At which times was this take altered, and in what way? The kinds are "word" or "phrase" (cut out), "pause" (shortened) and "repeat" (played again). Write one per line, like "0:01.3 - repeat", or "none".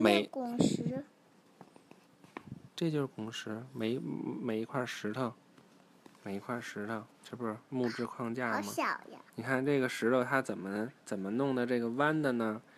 0:07.1 - pause
0:09.3 - pause
0:11.0 - pause